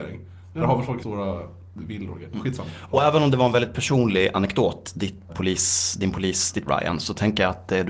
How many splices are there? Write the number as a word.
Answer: three